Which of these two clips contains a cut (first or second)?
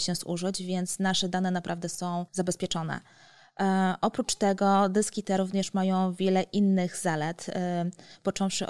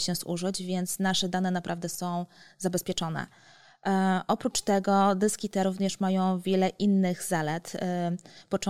first